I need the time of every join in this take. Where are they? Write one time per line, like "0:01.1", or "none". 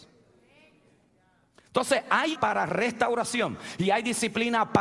0:02.4